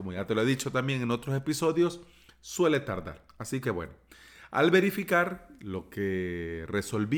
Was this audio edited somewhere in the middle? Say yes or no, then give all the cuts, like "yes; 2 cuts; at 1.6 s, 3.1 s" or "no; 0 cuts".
no; 0 cuts